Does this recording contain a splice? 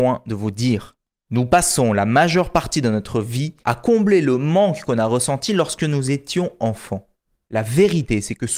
yes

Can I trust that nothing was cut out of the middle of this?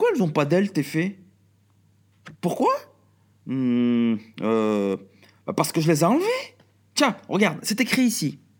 no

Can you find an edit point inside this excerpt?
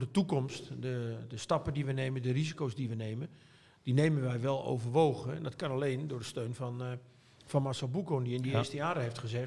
no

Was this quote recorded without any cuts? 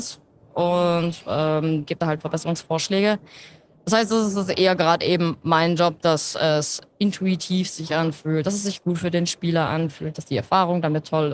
yes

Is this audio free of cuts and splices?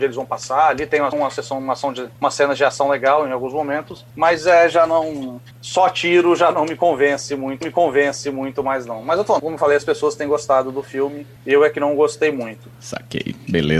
no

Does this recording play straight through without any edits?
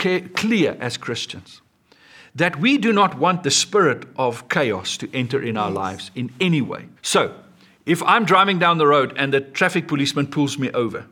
no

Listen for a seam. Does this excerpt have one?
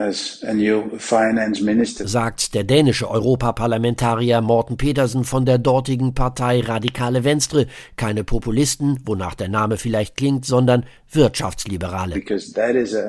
no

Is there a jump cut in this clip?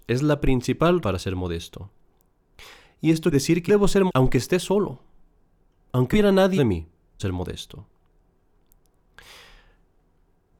yes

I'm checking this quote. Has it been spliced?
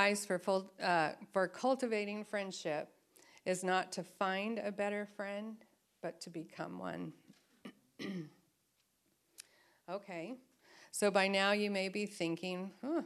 no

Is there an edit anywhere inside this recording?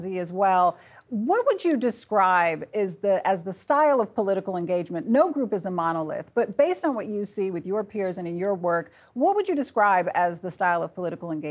no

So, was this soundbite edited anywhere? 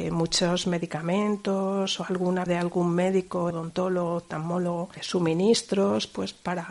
yes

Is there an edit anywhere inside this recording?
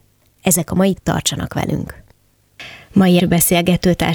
yes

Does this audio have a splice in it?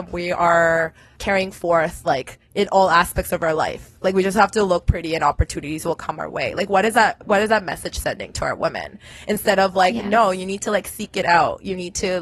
yes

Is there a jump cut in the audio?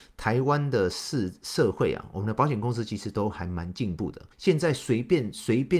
yes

